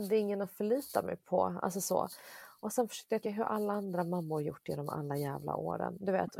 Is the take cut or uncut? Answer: cut